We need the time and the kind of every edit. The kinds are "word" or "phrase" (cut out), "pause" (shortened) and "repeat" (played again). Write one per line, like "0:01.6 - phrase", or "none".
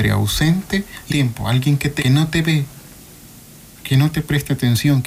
0:01.1 - phrase
0:02.0 - word